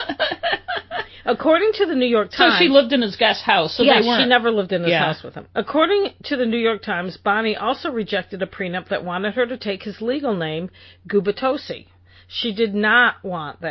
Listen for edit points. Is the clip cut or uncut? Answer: uncut